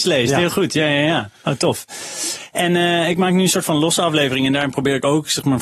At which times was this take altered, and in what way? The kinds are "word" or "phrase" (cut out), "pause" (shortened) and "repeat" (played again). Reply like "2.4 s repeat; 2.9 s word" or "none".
none